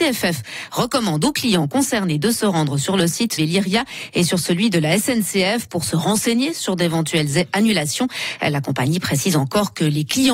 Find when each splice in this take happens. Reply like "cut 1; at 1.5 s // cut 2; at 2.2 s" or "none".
cut 1; at 3.4 s